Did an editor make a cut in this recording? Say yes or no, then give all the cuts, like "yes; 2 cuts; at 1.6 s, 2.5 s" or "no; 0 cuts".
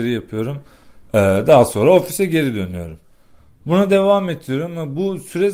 no; 0 cuts